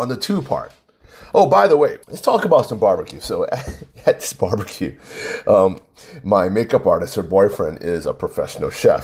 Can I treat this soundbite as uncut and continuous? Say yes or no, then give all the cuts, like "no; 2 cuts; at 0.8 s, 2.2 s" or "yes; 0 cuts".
no; 1 cut; at 2.0 s